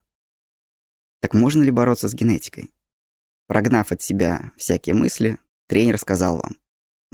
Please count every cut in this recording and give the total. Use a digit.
0